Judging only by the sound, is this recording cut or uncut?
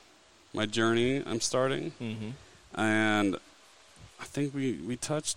uncut